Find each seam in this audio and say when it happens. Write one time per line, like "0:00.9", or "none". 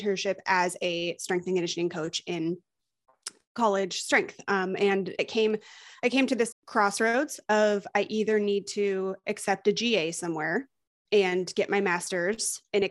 0:05.2
0:06.5